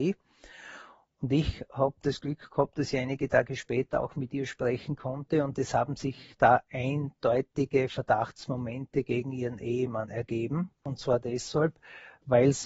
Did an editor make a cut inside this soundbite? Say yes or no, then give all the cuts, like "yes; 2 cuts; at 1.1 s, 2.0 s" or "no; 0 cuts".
no; 0 cuts